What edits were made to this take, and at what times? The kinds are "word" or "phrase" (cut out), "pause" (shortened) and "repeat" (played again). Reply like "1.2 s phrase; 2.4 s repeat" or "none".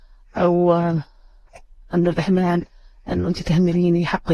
none